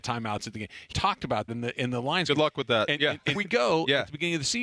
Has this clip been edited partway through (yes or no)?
yes